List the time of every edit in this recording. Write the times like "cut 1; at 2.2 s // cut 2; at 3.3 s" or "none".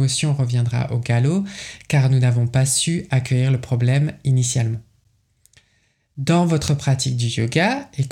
none